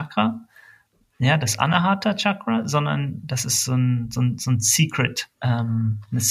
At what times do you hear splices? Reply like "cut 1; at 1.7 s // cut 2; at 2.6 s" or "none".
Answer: cut 1; at 5.3 s